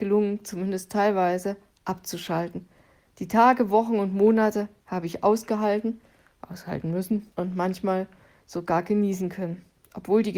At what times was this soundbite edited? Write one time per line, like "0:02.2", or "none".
0:07.3

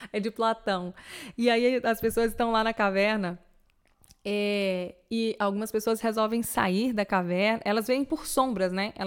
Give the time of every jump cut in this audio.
none

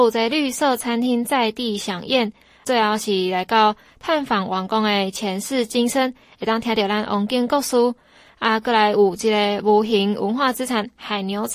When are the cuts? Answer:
0:02.6

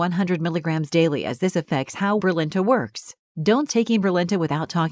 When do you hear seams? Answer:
0:02.2
0:03.7

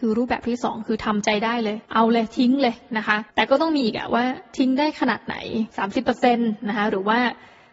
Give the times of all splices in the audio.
0:01.8
0:03.3
0:05.7

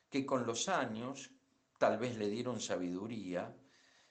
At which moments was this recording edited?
none

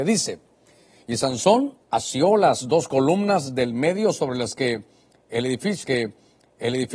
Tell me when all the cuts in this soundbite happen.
0:01.8
0:05.8

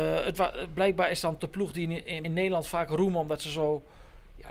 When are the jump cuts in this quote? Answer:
0:01.4
0:02.2

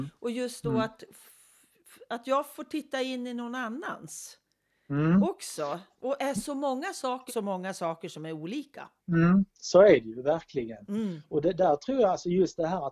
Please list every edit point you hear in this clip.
0:06.2
0:07.3
0:09.0

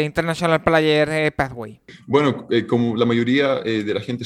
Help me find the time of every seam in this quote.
none

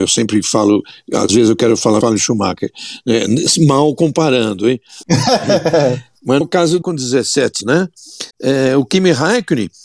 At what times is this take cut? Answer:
0:02.0
0:06.4
0:06.8
0:07.6
0:08.3

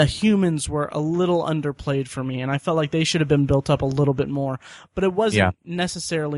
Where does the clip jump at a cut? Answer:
none

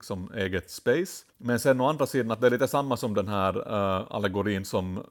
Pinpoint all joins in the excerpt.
0:01.3

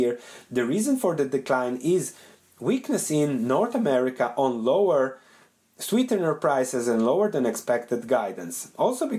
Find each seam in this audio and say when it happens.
none

